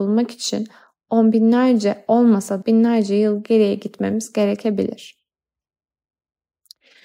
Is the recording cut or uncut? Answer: cut